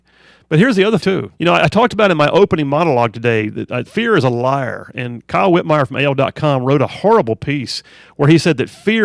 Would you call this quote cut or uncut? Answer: cut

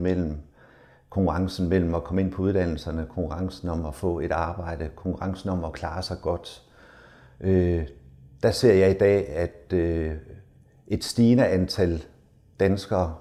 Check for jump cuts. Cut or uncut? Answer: uncut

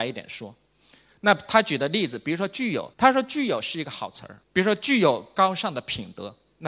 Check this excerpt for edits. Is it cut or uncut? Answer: cut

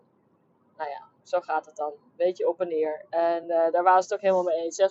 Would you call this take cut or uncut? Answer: uncut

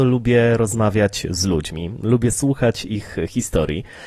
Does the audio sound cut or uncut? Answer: uncut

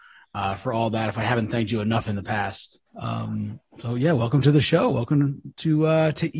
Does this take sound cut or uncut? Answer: cut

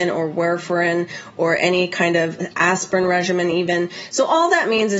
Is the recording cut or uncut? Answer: uncut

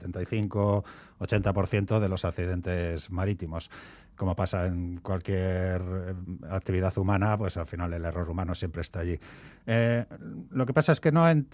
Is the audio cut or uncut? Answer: uncut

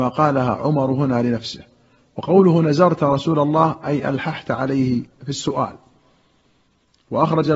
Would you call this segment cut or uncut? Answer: uncut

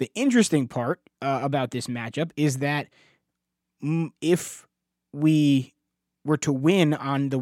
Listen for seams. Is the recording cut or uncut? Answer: cut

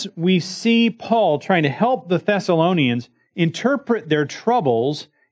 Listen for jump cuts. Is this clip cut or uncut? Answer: uncut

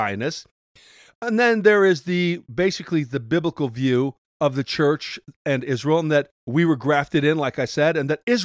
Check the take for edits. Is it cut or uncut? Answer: cut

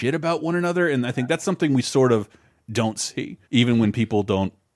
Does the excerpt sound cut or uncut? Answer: cut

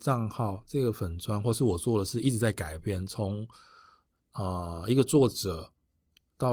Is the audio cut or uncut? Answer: uncut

